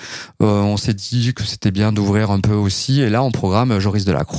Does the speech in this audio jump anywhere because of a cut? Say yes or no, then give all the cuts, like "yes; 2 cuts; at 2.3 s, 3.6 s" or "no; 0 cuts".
no; 0 cuts